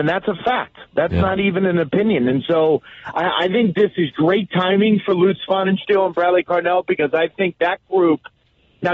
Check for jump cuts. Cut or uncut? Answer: uncut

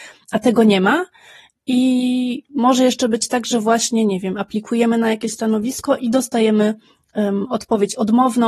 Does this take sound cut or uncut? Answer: uncut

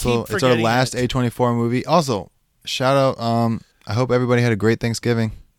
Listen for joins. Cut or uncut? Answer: uncut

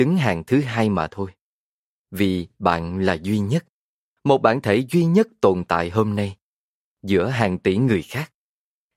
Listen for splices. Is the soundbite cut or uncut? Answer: uncut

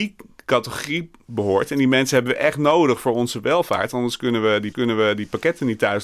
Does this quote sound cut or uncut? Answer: cut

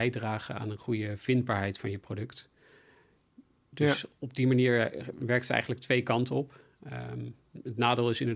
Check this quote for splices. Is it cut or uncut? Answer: uncut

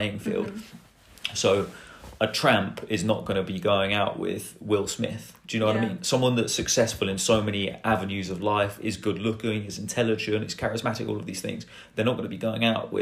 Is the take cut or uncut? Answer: uncut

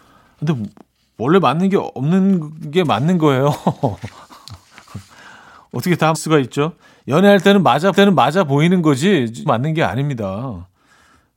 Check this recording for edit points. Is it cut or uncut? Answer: cut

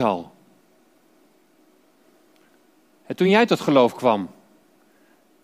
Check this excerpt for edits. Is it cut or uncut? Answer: uncut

